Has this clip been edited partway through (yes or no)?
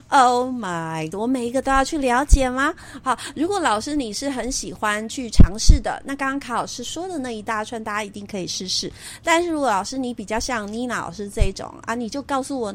yes